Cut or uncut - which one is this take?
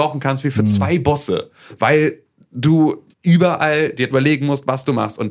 cut